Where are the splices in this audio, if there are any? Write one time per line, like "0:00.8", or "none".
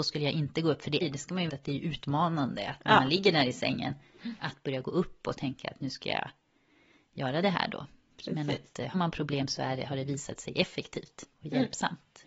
0:01.0
0:01.5
0:08.9